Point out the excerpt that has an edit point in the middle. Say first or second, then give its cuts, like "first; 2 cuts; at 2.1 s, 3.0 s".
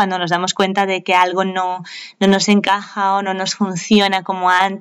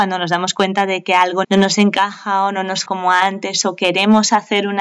second; 2 cuts; at 1.4 s, 2.9 s